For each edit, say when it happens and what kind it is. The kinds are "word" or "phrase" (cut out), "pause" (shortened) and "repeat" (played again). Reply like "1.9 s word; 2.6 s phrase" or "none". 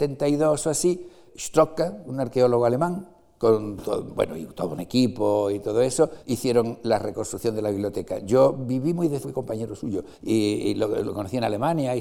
1.3 s word; 6.2 s pause; 9.2 s phrase; 10.1 s pause